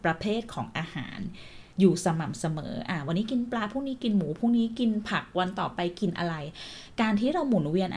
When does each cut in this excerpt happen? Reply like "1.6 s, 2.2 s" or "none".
1.7 s